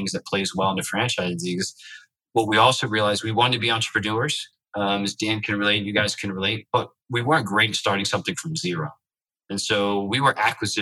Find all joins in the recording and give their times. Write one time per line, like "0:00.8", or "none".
none